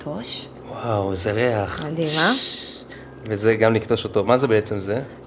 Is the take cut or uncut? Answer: uncut